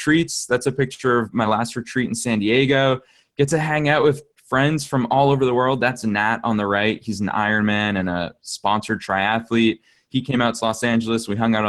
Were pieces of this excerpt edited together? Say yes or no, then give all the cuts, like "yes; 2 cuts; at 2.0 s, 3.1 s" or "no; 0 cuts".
no; 0 cuts